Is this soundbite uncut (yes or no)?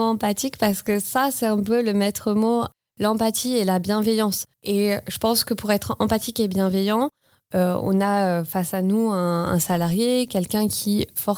no